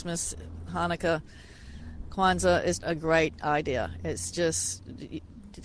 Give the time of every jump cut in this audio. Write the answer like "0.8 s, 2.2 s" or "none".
2.8 s